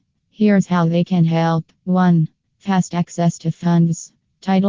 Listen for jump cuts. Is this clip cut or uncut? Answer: cut